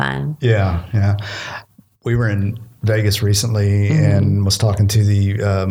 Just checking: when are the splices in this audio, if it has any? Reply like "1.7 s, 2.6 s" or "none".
none